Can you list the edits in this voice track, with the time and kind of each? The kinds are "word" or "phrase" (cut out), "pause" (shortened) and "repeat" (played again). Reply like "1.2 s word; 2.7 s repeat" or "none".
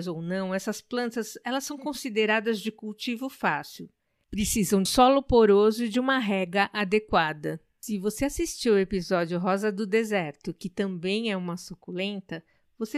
4.9 s word